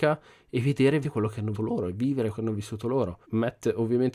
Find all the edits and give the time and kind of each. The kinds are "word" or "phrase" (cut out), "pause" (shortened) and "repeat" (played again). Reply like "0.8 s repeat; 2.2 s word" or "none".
1.0 s word; 1.5 s word; 2.3 s word; 3.2 s pause